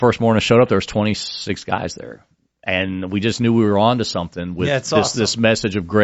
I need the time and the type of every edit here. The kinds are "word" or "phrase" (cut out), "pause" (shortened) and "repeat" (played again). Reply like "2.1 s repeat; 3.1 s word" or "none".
none